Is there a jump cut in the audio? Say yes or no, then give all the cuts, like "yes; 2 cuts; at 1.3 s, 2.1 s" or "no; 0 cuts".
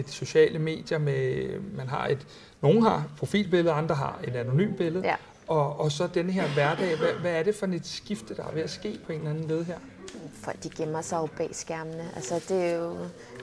no; 0 cuts